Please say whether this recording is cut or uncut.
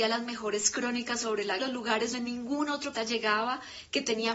cut